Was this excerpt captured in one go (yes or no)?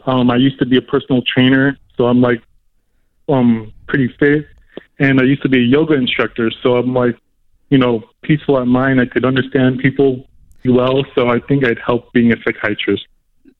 no